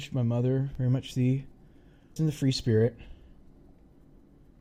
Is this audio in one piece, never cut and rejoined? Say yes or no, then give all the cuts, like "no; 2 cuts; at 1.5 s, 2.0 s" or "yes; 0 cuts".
no; 1 cut; at 2.2 s